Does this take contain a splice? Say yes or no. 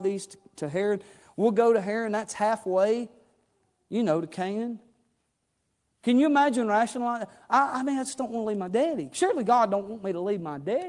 no